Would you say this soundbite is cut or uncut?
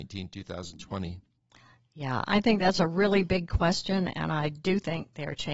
uncut